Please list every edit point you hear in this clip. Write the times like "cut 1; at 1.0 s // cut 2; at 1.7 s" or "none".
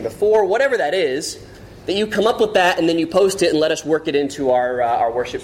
none